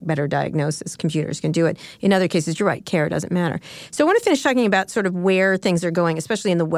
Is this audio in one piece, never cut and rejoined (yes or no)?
yes